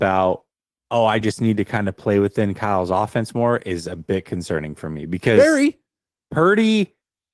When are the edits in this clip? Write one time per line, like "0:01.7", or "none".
none